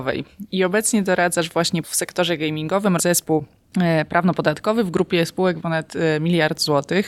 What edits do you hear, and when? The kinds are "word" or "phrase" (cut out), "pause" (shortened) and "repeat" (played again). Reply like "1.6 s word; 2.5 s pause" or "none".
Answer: 1.8 s word; 3.0 s word; 5.6 s word